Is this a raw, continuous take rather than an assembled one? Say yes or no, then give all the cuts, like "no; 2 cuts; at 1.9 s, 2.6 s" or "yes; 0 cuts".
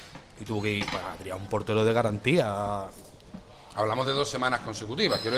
yes; 0 cuts